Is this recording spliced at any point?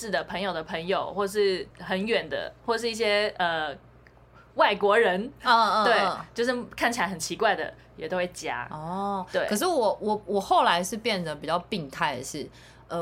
yes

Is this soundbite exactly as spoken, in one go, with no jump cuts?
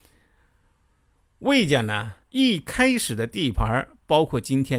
no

